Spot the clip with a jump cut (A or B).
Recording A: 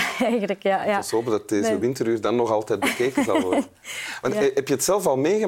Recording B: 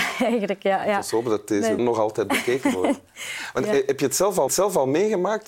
B